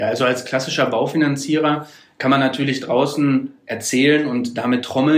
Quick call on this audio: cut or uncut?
uncut